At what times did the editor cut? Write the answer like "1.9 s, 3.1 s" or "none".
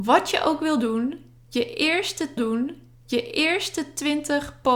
2.4 s